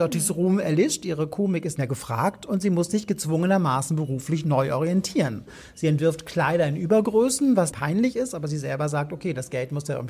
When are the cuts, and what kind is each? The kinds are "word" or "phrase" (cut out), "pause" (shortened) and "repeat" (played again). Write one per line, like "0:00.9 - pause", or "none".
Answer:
0:01.8 - word
0:07.7 - phrase